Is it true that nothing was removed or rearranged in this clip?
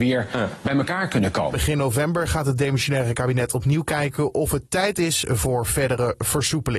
yes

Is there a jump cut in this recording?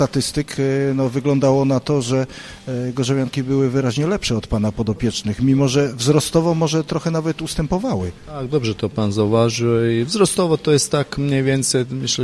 no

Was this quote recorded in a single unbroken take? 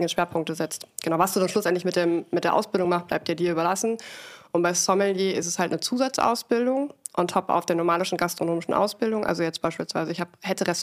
yes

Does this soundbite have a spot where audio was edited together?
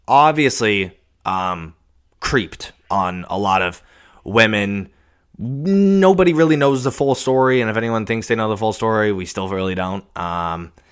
no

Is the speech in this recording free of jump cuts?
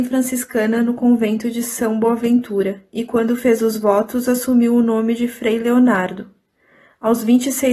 yes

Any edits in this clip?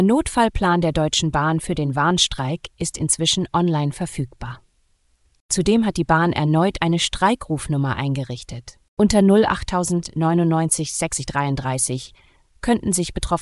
no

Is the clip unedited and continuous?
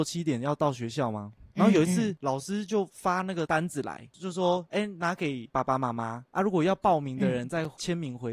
yes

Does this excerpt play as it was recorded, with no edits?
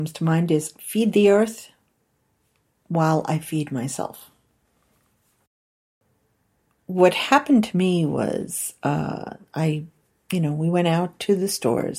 yes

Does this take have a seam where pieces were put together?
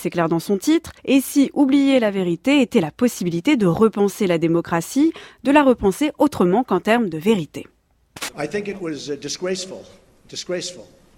yes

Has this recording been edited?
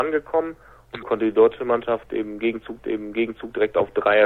yes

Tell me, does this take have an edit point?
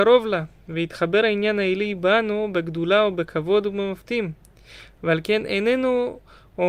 no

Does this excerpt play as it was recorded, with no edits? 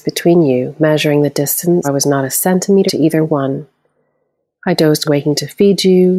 no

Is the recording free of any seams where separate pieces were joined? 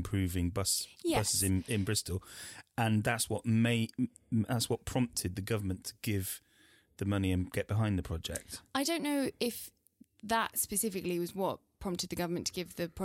yes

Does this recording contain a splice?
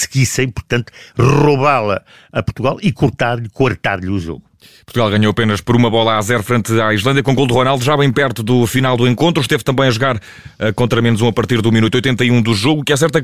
no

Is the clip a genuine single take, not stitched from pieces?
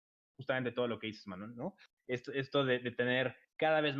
yes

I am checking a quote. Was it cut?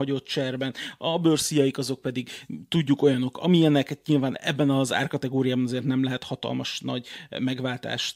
no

